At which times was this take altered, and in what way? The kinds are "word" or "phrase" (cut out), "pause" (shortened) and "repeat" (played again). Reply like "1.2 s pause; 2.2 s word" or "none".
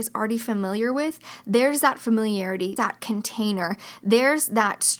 2.8 s word